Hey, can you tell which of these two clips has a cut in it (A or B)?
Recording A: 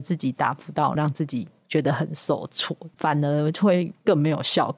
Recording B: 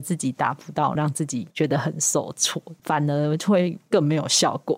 B